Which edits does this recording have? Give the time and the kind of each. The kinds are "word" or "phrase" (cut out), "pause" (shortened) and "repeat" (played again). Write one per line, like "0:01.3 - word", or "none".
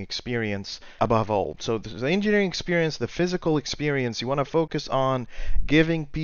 0:01.0 - word